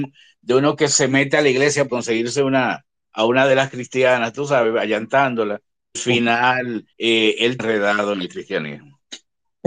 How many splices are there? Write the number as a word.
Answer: four